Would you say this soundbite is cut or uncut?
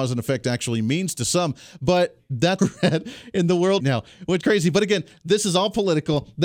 cut